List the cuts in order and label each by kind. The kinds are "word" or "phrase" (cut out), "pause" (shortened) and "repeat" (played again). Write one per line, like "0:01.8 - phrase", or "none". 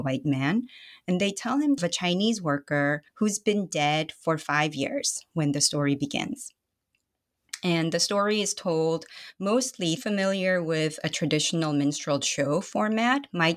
0:01.8 - phrase
0:03.1 - pause
0:10.0 - phrase